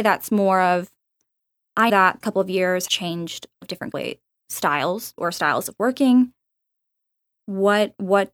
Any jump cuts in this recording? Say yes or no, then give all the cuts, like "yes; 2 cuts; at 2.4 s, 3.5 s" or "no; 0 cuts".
yes; 6 cuts; at 1.9 s, 2.2 s, 2.9 s, 3.6 s, 3.9 s, 5.2 s